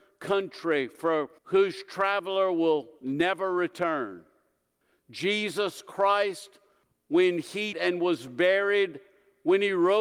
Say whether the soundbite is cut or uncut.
cut